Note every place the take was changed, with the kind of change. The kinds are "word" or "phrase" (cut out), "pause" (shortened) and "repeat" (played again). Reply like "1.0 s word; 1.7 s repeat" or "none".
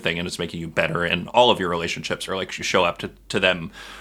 2.3 s word; 2.6 s phrase